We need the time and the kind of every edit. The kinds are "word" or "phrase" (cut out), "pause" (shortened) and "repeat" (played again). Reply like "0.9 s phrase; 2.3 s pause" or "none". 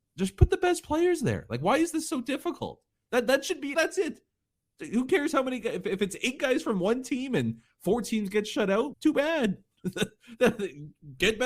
3.7 s word; 8.9 s word